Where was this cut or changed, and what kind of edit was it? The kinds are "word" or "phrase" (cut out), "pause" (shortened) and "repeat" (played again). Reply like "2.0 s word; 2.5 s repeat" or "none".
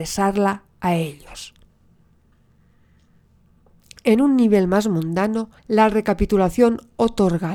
5.6 s pause